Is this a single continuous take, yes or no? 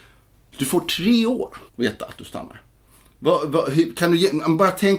no